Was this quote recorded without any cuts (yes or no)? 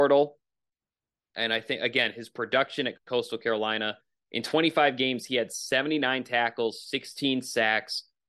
yes